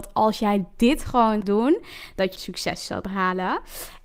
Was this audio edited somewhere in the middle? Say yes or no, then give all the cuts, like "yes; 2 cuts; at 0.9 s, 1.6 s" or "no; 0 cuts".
yes; 3 cuts; at 1.4 s, 2.4 s, 3.0 s